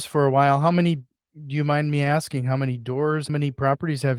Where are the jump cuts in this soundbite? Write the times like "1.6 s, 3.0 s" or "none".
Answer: 3.3 s